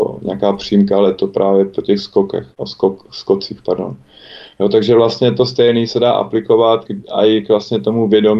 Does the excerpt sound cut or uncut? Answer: cut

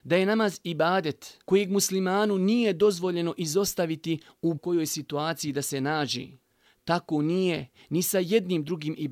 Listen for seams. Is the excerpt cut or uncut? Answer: cut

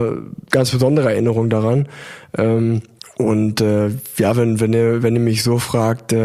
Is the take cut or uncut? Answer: cut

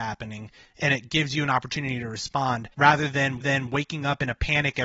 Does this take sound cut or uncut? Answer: cut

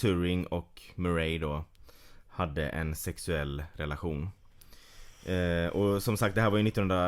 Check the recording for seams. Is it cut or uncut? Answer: uncut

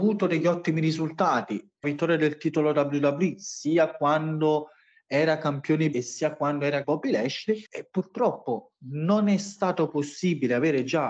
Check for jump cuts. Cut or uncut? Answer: cut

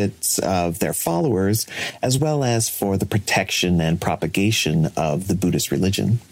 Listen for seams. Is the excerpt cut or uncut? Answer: uncut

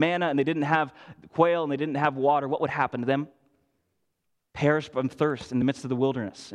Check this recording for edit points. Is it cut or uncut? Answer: uncut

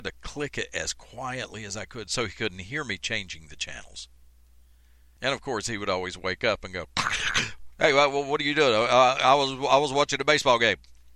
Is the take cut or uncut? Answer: uncut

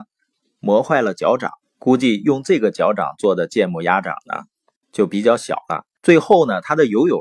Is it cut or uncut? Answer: cut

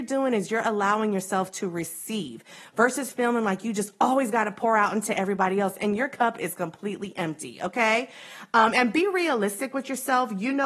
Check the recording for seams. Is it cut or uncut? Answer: uncut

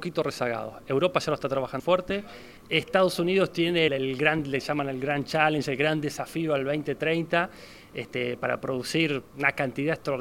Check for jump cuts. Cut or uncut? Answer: cut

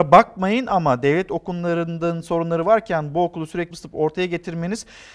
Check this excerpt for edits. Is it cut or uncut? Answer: cut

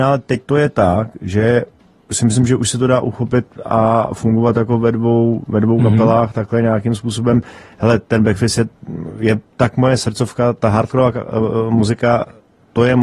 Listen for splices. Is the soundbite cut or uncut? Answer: uncut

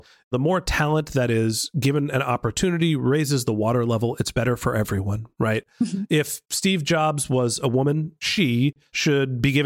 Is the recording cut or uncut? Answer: uncut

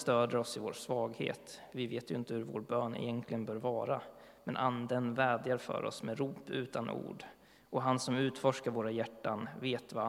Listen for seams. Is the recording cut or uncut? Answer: uncut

